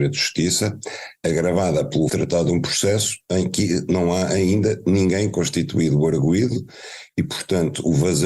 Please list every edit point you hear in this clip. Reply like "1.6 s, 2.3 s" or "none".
2.1 s